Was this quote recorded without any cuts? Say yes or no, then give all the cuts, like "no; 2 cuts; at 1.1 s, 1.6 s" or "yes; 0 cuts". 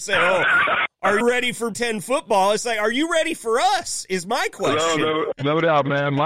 no; 3 cuts; at 1.2 s, 1.7 s, 5.3 s